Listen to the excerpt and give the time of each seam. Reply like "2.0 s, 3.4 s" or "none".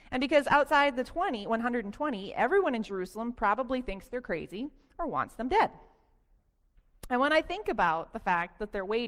none